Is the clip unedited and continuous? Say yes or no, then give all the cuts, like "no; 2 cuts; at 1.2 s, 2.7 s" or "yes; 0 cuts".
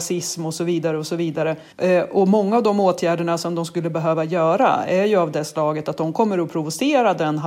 no; 1 cut; at 1.7 s